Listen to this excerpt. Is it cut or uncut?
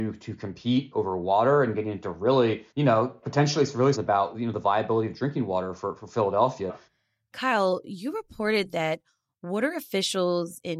cut